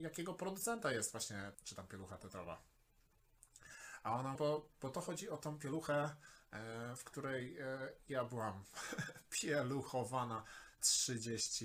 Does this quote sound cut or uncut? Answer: cut